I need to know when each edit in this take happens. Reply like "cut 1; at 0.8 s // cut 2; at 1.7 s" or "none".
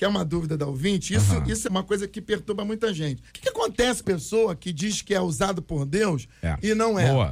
cut 1; at 1.6 s // cut 2; at 3.3 s // cut 3; at 4.0 s